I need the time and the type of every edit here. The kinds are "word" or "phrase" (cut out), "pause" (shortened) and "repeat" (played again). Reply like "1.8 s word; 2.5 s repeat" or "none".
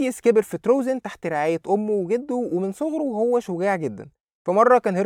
none